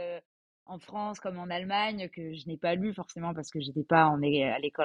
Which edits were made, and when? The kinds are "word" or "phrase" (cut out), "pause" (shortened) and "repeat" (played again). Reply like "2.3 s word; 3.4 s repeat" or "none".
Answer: none